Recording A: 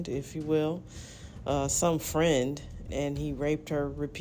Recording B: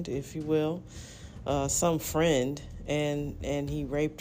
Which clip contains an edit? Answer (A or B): A